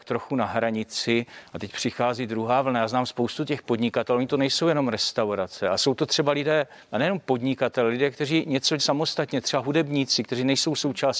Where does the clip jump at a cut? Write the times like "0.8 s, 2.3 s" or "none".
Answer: 8.8 s